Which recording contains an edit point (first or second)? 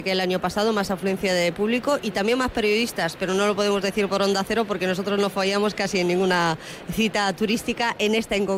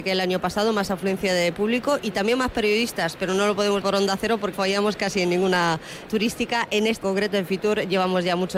second